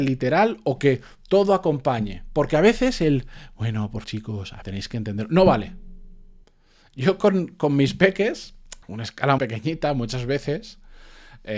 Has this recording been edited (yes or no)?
yes